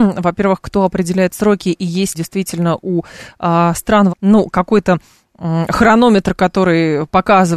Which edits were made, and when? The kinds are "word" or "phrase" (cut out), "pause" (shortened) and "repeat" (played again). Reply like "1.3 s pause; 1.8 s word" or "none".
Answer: 2.1 s word; 4.1 s word